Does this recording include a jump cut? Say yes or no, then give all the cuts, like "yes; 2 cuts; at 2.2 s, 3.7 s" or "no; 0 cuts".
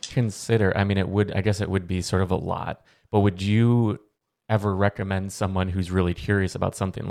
no; 0 cuts